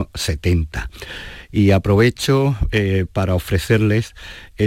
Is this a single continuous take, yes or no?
yes